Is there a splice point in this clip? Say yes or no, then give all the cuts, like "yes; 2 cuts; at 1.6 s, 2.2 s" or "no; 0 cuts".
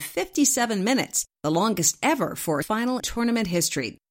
yes; 2 cuts; at 2.6 s, 3.0 s